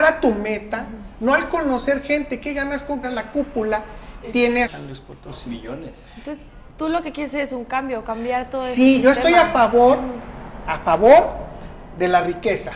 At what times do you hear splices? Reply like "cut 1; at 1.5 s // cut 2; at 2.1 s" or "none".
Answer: cut 1; at 3.0 s // cut 2; at 4.2 s // cut 3; at 4.6 s